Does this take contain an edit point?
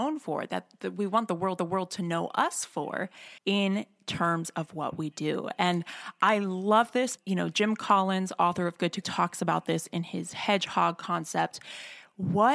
yes; 4 cuts; at 1.6 s, 3.4 s, 7.2 s, 9.0 s

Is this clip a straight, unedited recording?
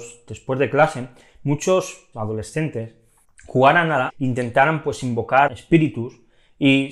no; 4 cuts; at 2.1 s, 3.2 s, 4.1 s, 5.5 s

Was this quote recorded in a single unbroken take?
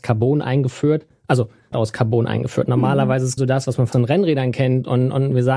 no; 3 cuts; at 1.7 s, 3.4 s, 3.9 s

